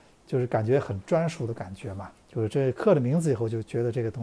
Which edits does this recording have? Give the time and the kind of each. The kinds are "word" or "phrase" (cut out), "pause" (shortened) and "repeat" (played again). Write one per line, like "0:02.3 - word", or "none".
0:02.2 - pause